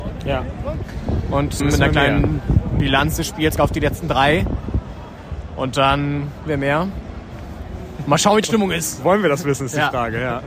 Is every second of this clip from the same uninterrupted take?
no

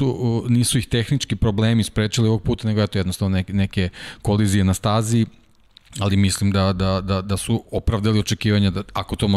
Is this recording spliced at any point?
no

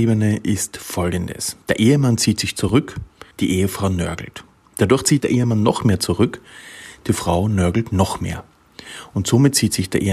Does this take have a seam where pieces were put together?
yes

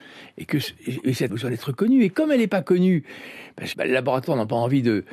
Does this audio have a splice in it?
yes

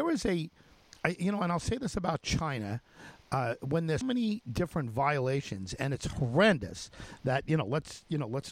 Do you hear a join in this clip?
yes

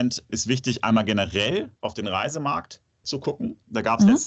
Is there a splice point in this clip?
yes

